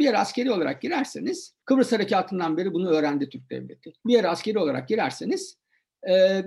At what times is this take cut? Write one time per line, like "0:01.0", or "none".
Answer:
0:01.6
0:04.0